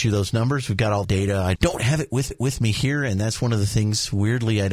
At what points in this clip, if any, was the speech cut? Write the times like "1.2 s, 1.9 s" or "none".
1.0 s, 1.6 s, 2.3 s